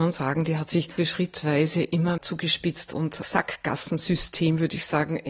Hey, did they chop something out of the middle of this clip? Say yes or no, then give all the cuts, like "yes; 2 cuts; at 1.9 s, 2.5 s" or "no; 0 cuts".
yes; 3 cuts; at 1.0 s, 2.2 s, 3.2 s